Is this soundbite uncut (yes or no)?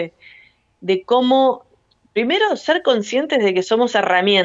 yes